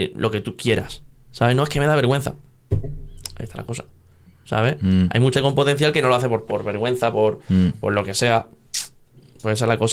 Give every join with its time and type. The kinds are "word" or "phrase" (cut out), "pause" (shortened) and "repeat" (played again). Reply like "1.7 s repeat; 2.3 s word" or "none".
2.5 s pause; 5.3 s word; 6.5 s word